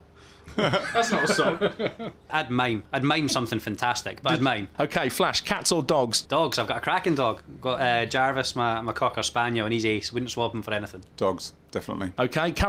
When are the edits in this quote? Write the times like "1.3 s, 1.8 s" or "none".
none

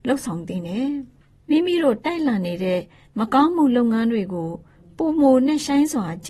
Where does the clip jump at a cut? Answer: none

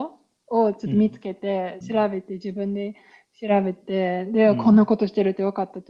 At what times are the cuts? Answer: 1.8 s

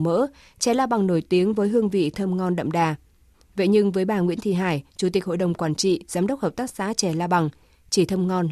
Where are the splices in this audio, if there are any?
none

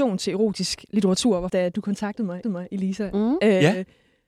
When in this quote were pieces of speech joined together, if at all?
1.5 s, 2.4 s

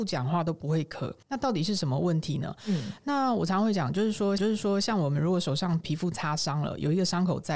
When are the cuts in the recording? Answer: 1.2 s, 4.4 s

